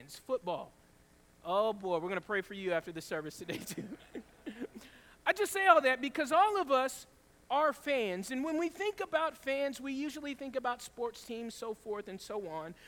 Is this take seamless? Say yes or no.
yes